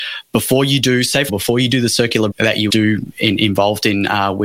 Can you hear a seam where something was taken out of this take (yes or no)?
yes